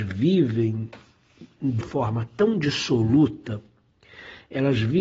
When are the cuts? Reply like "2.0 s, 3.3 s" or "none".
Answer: 1.8 s